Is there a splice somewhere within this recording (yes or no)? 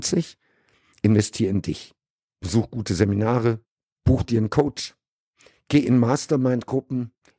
no